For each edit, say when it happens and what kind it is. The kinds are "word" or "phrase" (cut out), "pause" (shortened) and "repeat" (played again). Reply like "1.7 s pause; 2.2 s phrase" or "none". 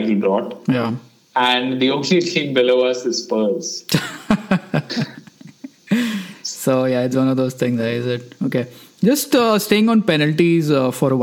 none

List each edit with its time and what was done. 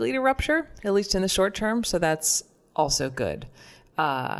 none

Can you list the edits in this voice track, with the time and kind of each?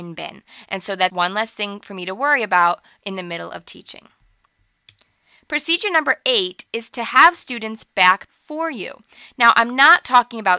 1.1 s word; 7.9 s word; 8.3 s word

